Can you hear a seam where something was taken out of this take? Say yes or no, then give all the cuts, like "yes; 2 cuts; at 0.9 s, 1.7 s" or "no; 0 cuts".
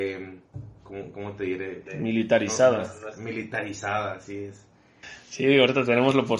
no; 0 cuts